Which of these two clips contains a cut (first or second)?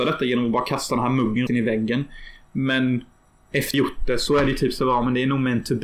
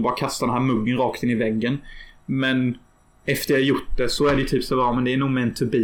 first